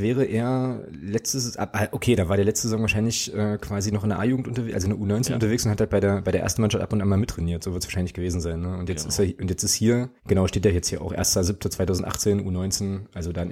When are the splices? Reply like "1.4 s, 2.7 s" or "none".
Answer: 10.2 s